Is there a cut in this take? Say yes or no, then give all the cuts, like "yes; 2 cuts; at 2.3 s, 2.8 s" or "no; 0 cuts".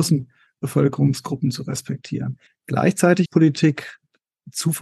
yes; 1 cut; at 3.2 s